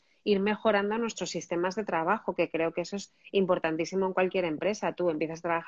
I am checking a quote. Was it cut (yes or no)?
no